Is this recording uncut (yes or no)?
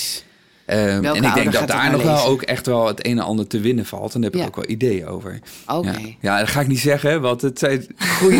yes